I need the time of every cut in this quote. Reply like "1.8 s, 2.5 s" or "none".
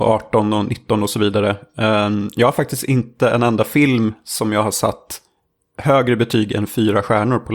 none